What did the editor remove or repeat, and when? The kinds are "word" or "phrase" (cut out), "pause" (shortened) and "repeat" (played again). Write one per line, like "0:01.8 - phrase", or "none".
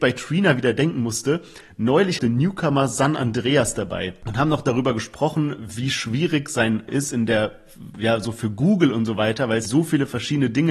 0:02.2 - phrase
0:05.6 - word
0:06.9 - word
0:09.7 - word